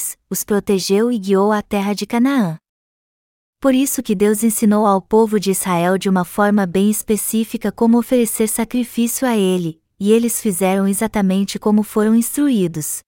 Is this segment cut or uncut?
uncut